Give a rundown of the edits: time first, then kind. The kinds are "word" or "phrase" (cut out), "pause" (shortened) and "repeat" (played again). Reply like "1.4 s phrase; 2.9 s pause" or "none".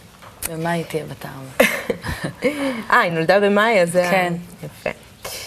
none